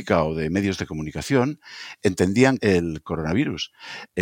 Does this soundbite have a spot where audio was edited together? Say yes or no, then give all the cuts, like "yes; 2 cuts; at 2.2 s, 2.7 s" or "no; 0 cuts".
yes; 1 cut; at 2.6 s